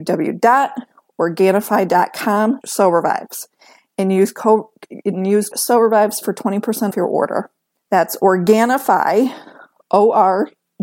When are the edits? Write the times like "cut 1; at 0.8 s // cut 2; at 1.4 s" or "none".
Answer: cut 1; at 2.6 s // cut 2; at 5.5 s // cut 3; at 6.9 s

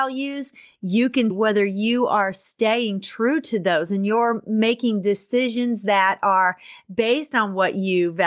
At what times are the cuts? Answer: cut 1; at 1.3 s

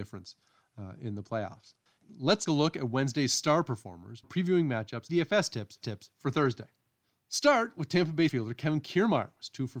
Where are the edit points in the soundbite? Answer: cut 1; at 2.5 s // cut 2; at 4.2 s // cut 3; at 5.1 s // cut 4; at 5.8 s // cut 5; at 7.0 s // cut 6; at 8.3 s

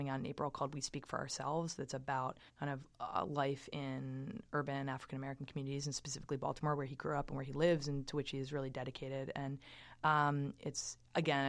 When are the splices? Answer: cut 1; at 2.5 s

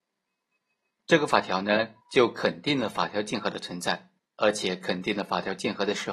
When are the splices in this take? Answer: cut 1; at 2.0 s // cut 2; at 4.2 s

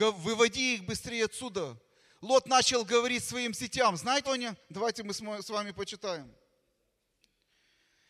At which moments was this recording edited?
cut 1; at 4.2 s

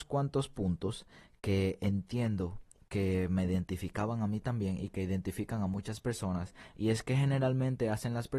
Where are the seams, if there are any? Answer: none

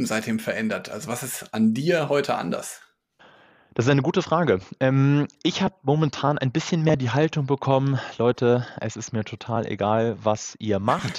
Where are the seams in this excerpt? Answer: cut 1; at 3.2 s

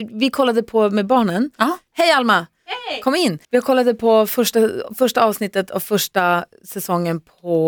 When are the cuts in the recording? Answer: cut 1; at 3.4 s

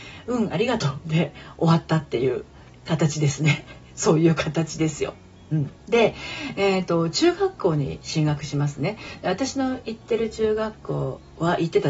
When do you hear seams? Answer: cut 1; at 5.8 s

